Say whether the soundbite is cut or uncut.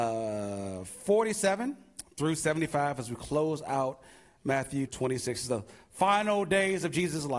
cut